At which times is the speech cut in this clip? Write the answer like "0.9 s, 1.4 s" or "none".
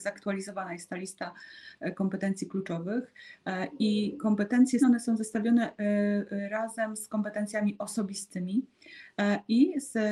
4.8 s